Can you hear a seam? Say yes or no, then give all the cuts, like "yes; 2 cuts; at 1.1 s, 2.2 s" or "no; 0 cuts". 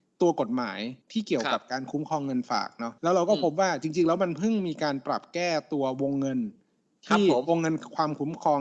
yes; 2 cuts; at 1.0 s, 3.0 s